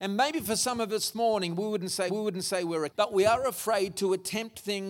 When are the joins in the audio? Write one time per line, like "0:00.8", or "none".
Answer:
0:01.1
0:02.1
0:02.9